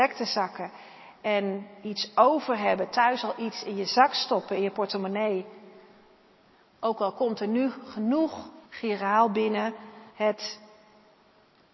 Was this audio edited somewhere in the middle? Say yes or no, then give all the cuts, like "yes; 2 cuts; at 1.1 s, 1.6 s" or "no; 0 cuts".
yes; 2 cuts; at 8.7 s, 10.1 s